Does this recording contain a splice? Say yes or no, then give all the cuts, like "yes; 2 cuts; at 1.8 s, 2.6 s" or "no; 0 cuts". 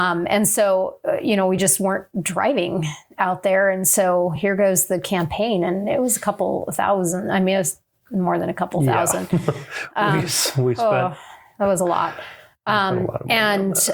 no; 0 cuts